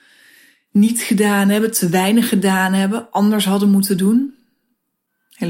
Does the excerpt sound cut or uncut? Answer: uncut